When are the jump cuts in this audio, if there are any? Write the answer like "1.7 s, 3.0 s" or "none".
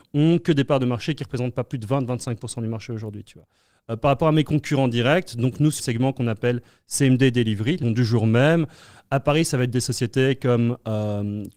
5.8 s, 7.8 s